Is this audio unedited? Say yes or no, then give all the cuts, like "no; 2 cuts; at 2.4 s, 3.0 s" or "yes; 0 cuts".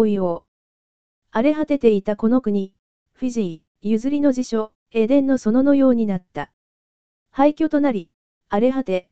no; 2 cuts; at 3.7 s, 4.8 s